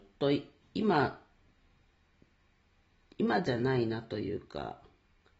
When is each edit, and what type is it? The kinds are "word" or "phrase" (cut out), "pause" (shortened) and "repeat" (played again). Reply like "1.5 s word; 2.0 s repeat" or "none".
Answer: none

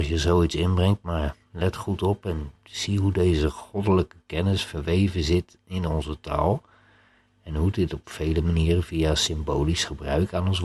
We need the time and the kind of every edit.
none

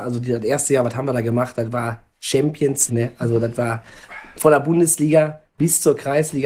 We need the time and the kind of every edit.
2.9 s word

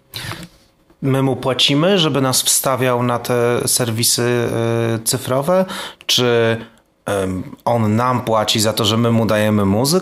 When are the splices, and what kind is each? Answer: none

